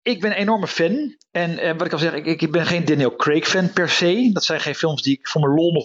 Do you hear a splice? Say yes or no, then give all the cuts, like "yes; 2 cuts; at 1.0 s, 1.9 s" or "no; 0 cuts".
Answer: no; 0 cuts